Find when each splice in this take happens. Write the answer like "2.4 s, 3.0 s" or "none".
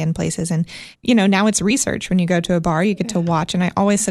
0.9 s